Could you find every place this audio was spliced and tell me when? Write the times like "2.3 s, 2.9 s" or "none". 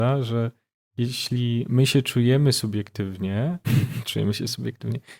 3.6 s